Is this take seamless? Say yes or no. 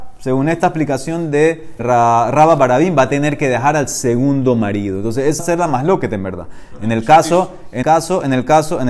no